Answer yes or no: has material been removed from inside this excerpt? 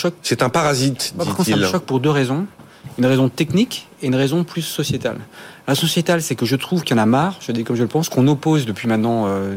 no